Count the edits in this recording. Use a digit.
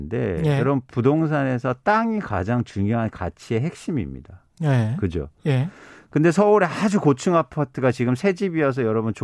0